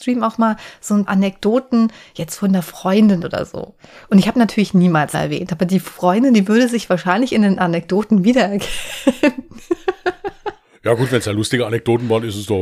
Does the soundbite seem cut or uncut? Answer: cut